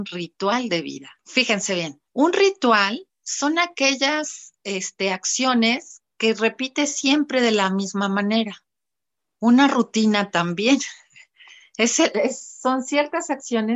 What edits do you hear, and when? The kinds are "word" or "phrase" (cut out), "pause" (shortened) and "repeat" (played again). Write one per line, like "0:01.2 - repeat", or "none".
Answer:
0:01.2 - pause
0:02.1 - pause